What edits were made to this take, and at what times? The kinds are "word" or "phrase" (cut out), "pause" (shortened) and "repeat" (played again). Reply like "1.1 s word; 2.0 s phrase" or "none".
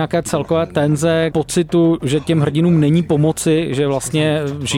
none